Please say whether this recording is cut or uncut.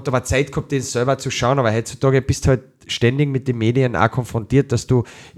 uncut